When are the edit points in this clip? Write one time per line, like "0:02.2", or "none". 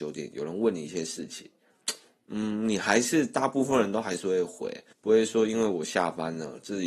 0:04.9

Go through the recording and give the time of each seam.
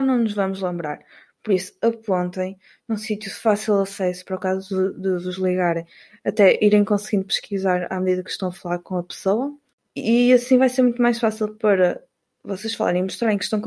none

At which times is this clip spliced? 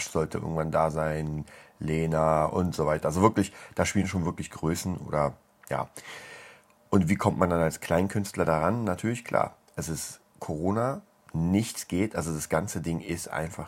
0:10.3

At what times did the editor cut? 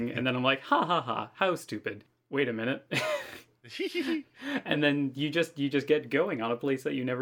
none

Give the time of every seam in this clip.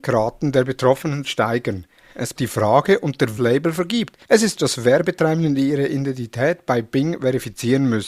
0:01.2
0:02.4
0:03.4
0:04.2
0:04.6

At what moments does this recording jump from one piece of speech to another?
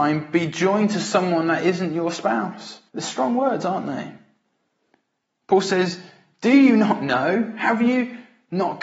0:02.9

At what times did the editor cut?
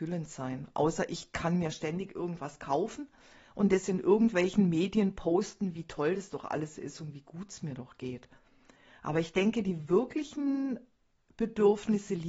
none

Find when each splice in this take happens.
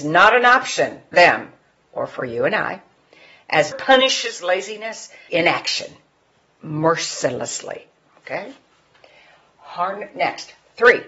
0:01.1
0:03.7
0:05.3

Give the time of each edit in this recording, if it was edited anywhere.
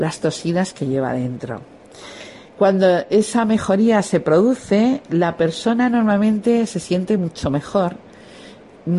none

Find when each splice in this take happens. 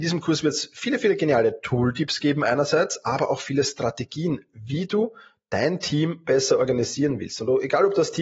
none

